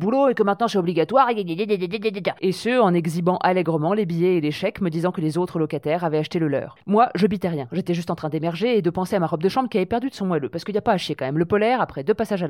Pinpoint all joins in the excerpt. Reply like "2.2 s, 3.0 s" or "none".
none